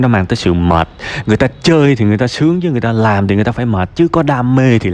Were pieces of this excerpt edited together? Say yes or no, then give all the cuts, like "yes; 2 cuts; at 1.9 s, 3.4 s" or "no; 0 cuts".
no; 0 cuts